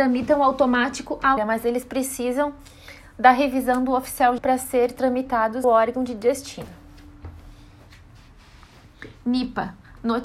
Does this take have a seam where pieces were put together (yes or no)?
yes